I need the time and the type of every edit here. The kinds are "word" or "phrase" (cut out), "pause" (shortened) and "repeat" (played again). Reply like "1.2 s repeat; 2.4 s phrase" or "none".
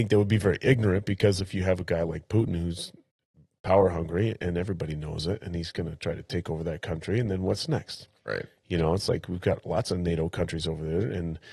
none